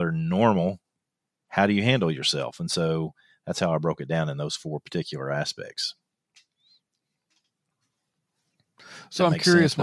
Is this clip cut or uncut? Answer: uncut